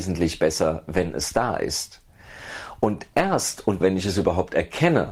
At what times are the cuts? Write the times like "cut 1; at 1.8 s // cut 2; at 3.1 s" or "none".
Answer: cut 1; at 3.8 s